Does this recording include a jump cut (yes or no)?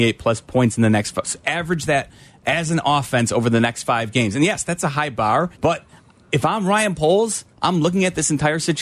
yes